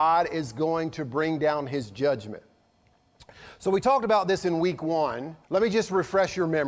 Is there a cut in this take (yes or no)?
yes